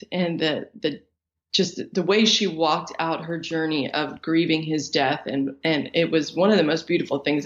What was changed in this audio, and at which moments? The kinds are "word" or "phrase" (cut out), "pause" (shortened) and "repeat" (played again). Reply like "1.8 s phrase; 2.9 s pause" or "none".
none